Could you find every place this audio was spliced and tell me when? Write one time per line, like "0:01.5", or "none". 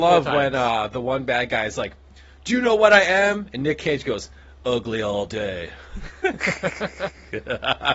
none